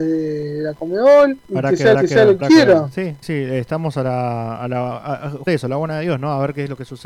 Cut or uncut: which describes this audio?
cut